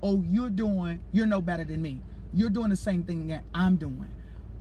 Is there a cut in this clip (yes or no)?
no